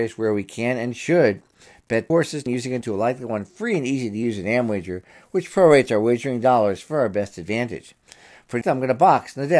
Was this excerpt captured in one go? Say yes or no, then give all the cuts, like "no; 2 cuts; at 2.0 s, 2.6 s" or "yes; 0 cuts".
no; 4 cuts; at 2.1 s, 2.5 s, 2.8 s, 8.6 s